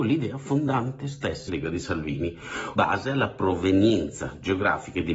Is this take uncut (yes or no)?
no